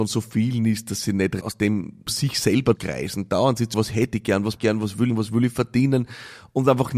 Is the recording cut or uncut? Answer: cut